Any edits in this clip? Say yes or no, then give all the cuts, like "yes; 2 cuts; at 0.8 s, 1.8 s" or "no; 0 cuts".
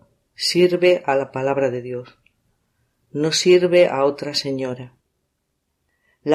no; 0 cuts